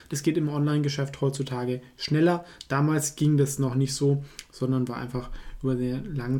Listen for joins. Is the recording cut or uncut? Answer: uncut